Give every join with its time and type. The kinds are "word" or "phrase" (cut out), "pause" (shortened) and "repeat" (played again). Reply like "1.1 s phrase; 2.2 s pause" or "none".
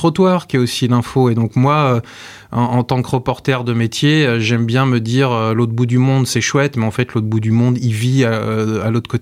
none